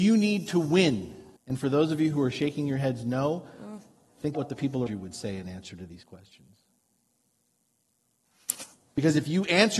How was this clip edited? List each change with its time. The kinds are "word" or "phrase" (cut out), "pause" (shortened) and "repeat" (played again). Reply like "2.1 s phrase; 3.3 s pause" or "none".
1.4 s pause; 4.3 s word; 4.9 s word

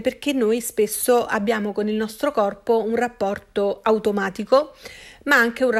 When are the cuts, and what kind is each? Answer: none

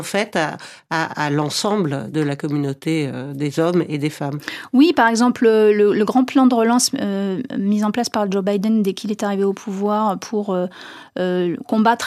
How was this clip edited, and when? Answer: none

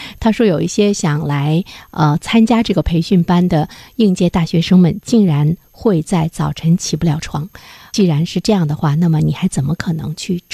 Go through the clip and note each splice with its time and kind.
none

